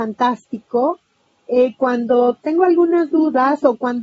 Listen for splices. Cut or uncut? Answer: uncut